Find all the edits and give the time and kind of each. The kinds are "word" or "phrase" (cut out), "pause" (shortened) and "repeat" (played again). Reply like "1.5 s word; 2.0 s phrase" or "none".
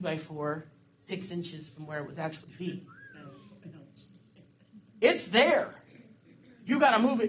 2.4 s word